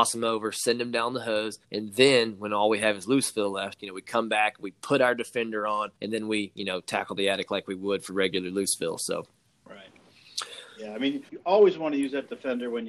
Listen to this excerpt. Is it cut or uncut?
cut